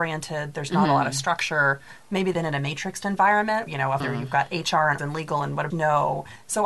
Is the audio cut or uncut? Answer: cut